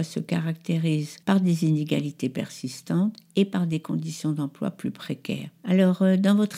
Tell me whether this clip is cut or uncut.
cut